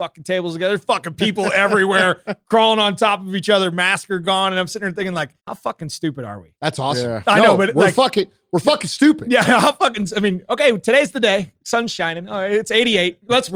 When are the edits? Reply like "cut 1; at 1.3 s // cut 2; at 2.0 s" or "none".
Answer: cut 1; at 5.4 s